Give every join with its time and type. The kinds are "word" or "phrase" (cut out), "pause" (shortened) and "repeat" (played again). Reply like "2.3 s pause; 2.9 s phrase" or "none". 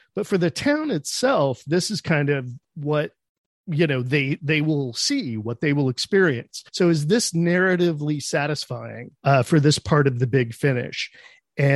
6.7 s pause; 9.2 s pause

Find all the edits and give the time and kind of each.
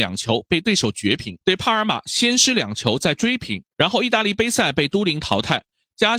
1.4 s pause; 3.7 s pause

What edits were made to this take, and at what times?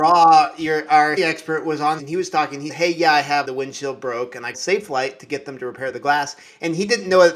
1.2 s word; 2.0 s word; 2.7 s word; 3.4 s phrase; 4.5 s word

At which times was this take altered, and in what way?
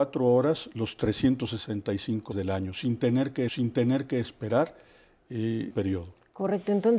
2.3 s word; 3.5 s repeat; 5.7 s word

